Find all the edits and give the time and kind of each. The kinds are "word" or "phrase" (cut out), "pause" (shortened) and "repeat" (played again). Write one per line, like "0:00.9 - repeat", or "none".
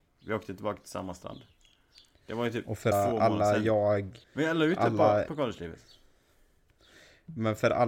0:02.9 - word
0:04.2 - pause
0:05.3 - phrase

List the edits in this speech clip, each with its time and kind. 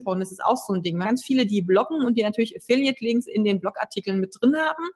0:01.0 - word

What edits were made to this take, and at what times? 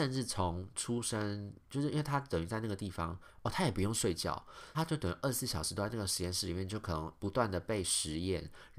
0:04.7 - phrase

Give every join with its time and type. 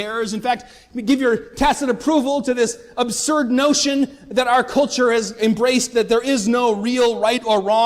none

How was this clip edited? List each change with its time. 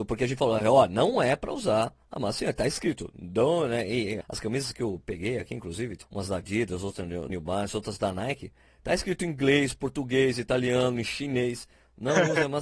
0:04.2 - word
0:06.0 - word
0:07.3 - word

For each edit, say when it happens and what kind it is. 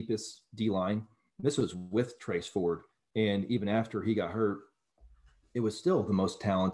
none

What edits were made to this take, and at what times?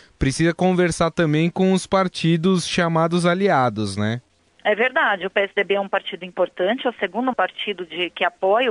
0:07.3 - word

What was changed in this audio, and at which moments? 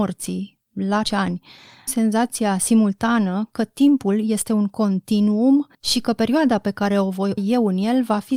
0:01.0 - word
0:01.9 - word
0:05.7 - pause
0:07.4 - word

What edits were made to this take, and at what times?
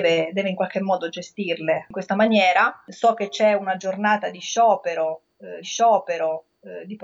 0:05.6 - repeat

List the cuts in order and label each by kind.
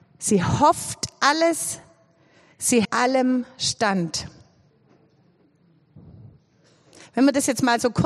0:02.8 - word

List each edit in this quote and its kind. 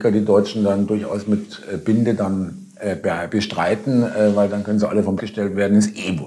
0:05.2 - word

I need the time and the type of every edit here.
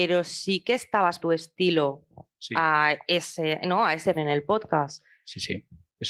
0:01.2 - word
0:04.1 - phrase

